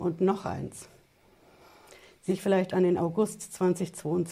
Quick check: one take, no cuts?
no; 1 cut; at 2.3 s

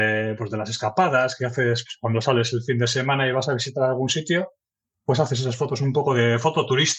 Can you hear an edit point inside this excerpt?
no; 0 cuts

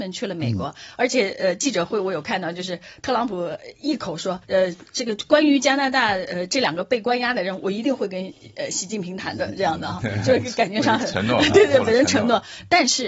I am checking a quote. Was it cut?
yes; 1 cut; at 4.4 s

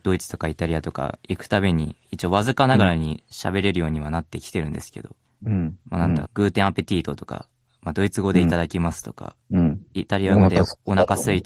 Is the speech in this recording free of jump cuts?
no; 3 cuts; at 5.3 s, 6.2 s, 9.4 s

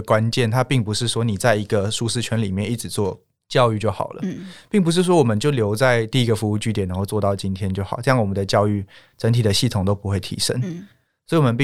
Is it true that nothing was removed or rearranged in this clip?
yes; 0 cuts

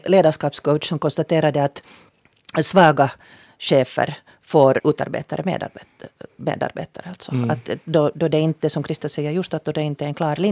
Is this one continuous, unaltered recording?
yes; 0 cuts

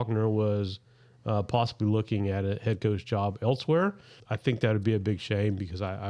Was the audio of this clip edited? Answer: no; 0 cuts

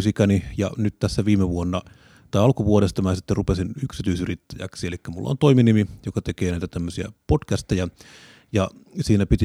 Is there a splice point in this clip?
no; 0 cuts

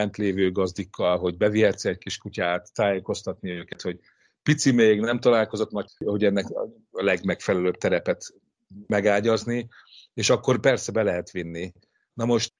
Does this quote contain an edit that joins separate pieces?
yes; 1 cut; at 5.9 s

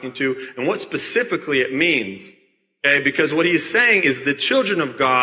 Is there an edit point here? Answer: no; 0 cuts

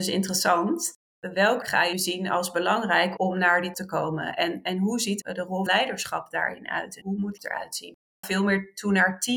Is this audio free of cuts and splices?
no; 9 cuts; at 1.6 s, 1.9 s, 3.2 s, 3.7 s, 5.2 s, 5.7 s, 7.0 s, 7.4 s, 8.2 s

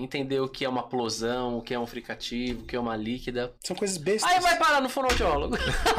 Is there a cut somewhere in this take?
yes; 1 cut; at 3.6 s

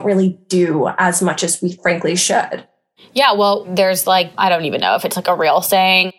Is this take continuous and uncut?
no; 1 cut; at 4.3 s

